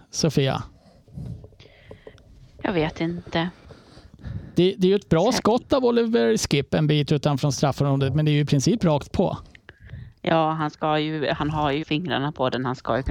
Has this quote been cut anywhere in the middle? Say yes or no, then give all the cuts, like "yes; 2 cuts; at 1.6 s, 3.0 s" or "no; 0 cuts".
yes; 1 cut; at 11.8 s